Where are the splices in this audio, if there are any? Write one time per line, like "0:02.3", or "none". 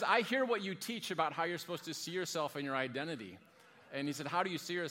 none